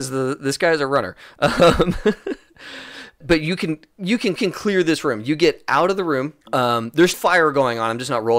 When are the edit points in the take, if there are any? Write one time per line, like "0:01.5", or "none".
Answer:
0:03.2
0:04.4
0:06.4
0:07.1